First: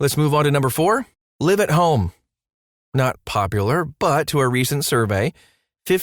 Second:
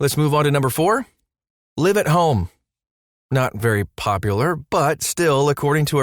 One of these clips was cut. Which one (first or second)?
first